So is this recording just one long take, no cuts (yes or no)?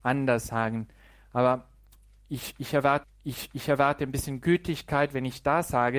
no